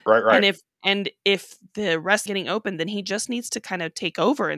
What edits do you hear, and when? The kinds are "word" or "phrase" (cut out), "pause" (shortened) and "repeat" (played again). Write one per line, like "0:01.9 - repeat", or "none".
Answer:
0:02.3 - phrase